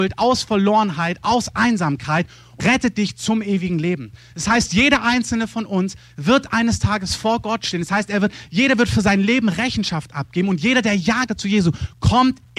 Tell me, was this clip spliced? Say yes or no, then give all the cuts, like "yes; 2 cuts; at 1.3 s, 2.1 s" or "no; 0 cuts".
yes; 2 cuts; at 2.6 s, 11.3 s